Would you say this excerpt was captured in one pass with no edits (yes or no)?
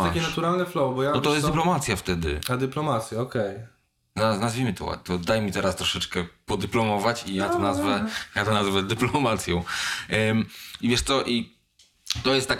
yes